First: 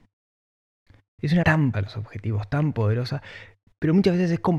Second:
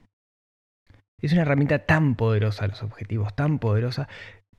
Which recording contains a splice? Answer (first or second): first